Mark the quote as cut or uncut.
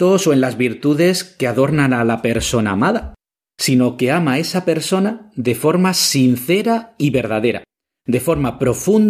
uncut